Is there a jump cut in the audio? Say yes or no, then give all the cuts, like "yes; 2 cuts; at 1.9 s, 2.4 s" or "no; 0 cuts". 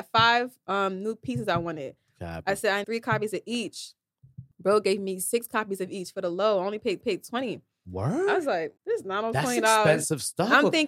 yes; 4 cuts; at 2.8 s, 4.5 s, 7.0 s, 8.8 s